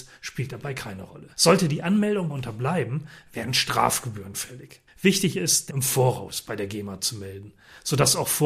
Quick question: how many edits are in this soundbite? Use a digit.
4